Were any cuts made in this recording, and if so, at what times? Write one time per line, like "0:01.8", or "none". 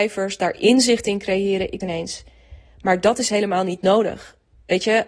0:01.8